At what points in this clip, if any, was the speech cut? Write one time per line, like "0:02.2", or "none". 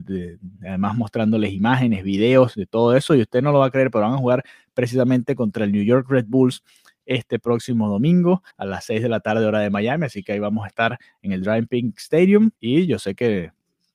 0:08.5
0:12.6